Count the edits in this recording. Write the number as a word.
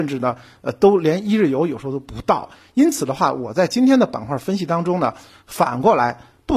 zero